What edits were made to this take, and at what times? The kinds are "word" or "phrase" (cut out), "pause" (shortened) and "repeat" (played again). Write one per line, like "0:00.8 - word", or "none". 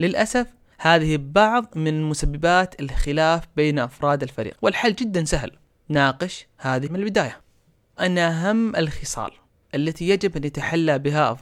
0:06.9 - word
0:08.0 - word